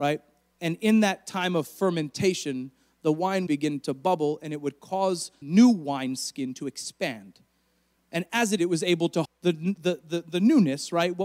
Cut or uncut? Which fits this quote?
cut